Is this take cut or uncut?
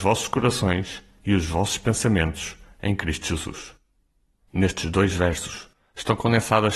uncut